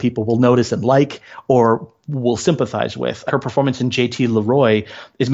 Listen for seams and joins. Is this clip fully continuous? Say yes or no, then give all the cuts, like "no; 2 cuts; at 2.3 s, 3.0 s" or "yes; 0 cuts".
no; 1 cut; at 3.3 s